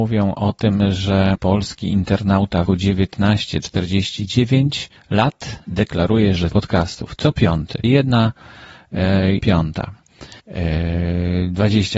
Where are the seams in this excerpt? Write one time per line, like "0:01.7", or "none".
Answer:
0:01.3
0:02.7
0:05.0
0:06.5
0:07.8
0:09.4
0:10.4